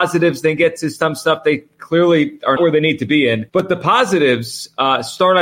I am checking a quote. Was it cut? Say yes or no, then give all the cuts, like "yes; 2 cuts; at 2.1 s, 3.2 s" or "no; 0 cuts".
yes; 2 cuts; at 2.6 s, 3.5 s